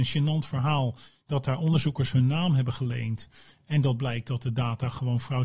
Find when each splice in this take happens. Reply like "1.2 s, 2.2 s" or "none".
none